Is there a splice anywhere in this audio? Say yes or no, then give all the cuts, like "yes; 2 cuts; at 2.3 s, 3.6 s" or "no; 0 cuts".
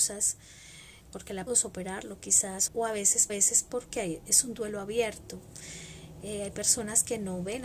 yes; 4 cuts; at 1.0 s, 1.5 s, 2.7 s, 3.3 s